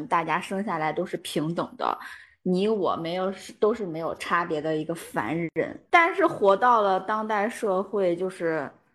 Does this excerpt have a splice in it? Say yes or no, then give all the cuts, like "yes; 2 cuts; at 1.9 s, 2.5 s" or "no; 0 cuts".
yes; 1 cut; at 5.9 s